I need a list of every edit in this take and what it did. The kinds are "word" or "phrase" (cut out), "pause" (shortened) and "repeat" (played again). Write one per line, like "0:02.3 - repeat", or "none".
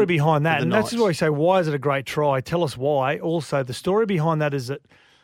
none